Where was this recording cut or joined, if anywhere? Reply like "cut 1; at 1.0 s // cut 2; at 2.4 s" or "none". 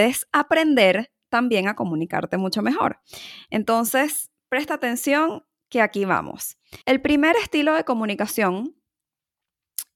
cut 1; at 6.8 s